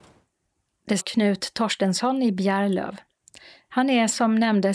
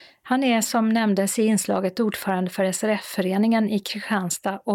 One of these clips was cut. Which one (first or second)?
first